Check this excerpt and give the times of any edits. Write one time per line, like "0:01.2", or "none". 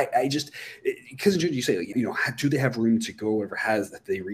0:01.9